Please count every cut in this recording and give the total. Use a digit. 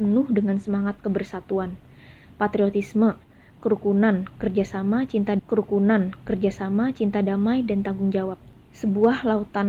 1